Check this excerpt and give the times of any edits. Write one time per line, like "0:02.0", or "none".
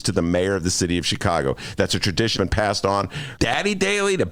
0:02.4
0:03.4